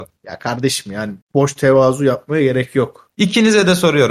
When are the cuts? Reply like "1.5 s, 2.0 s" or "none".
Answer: 1.2 s, 3.1 s